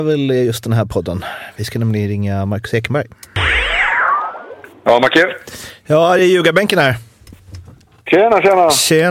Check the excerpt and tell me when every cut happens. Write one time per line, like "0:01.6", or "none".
none